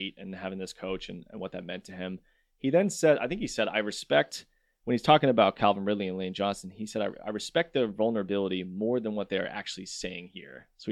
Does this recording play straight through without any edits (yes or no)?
yes